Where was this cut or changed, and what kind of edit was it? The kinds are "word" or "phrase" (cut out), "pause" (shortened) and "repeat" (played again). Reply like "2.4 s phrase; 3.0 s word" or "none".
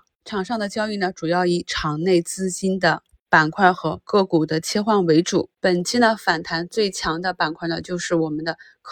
5.5 s pause